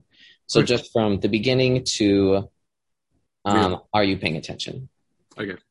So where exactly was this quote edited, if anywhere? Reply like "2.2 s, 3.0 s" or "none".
3.9 s